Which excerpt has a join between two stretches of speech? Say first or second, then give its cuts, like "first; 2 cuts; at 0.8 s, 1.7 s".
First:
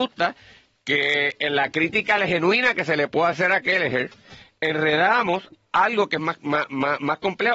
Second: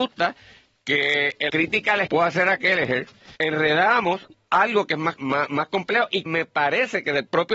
second; 5 cuts; at 1.5 s, 2.1 s, 3.4 s, 5.2 s, 6.3 s